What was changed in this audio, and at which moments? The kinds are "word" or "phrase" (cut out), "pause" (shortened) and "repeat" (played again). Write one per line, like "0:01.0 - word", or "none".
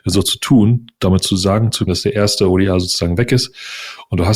0:01.9 - phrase